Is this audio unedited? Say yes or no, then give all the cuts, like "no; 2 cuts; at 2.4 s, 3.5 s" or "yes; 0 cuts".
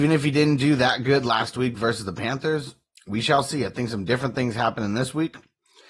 yes; 0 cuts